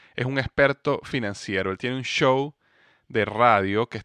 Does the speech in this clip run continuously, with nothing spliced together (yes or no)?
yes